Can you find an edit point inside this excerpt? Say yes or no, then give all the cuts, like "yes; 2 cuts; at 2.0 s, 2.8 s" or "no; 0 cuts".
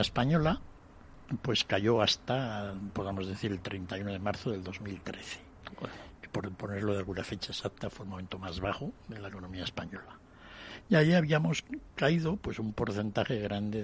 no; 0 cuts